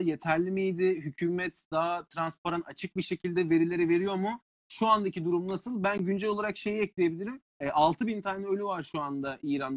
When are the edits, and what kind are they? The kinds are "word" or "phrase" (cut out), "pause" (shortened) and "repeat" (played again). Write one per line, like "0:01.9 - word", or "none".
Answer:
0:07.5 - pause